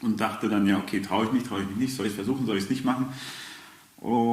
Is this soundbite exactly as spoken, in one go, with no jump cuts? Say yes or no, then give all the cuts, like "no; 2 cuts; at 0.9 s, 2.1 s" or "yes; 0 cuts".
yes; 0 cuts